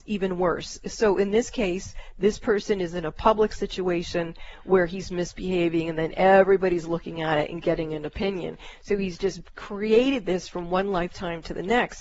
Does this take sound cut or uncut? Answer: uncut